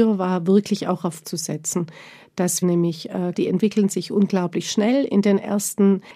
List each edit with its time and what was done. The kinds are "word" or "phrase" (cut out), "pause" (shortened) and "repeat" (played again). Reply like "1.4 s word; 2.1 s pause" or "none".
1.2 s word; 2.6 s word; 3.3 s word